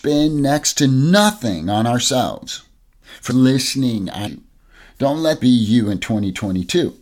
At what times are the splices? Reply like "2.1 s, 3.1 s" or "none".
3.3 s, 4.3 s, 5.4 s